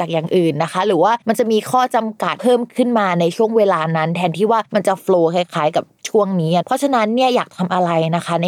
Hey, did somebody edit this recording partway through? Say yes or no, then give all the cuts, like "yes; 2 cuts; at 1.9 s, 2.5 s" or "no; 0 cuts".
yes; 2 cuts; at 1.2 s, 4.7 s